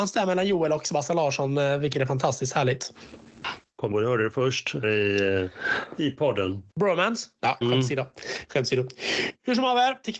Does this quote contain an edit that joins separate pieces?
yes; 5 cuts; at 1.9 s, 3.9 s, 4.8 s, 6.7 s, 7.6 s

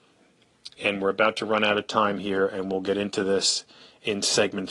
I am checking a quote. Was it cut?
no; 0 cuts

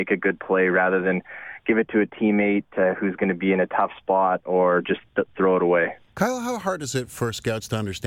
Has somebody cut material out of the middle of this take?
yes; 1 cut; at 6.1 s

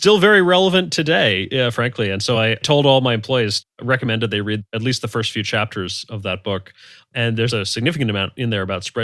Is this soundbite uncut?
yes; 0 cuts

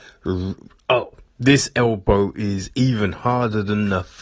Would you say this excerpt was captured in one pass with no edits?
yes; 0 cuts

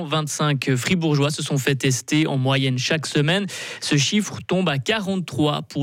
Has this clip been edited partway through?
no; 0 cuts

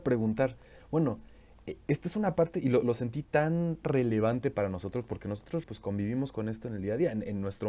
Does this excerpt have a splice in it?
yes; 3 cuts; at 1.8 s, 3.8 s, 5.6 s

